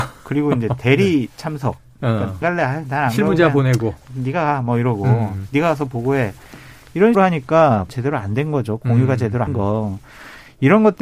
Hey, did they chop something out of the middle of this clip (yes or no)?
yes